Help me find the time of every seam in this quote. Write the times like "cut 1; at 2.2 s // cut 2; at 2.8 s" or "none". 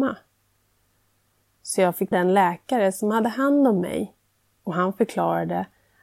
cut 1; at 2.1 s